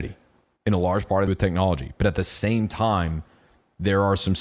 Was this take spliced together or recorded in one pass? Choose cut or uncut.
cut